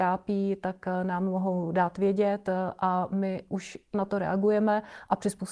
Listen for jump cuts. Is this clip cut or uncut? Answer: cut